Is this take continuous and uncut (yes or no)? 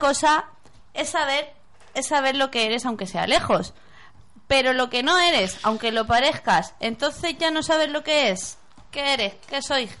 yes